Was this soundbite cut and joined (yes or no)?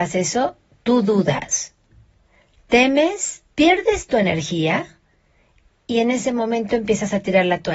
yes